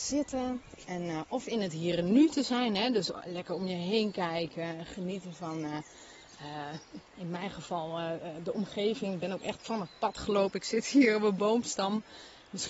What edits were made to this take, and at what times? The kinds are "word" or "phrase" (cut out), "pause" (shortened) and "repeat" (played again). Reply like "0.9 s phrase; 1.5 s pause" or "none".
7.1 s pause